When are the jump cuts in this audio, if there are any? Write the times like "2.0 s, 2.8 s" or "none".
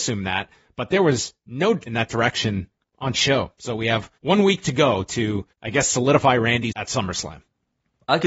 1.9 s, 3.1 s, 4.2 s, 5.5 s, 6.7 s